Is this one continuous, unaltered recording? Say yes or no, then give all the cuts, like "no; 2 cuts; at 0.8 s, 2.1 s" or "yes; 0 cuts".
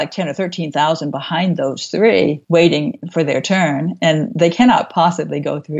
no; 1 cut; at 2.4 s